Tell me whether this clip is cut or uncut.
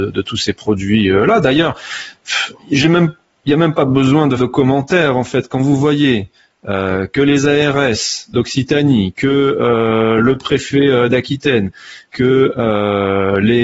cut